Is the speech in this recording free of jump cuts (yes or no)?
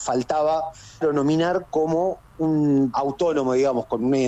no